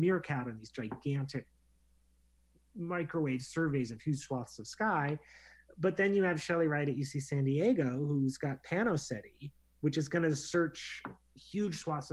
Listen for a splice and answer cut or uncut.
uncut